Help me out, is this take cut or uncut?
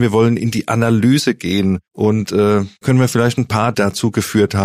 cut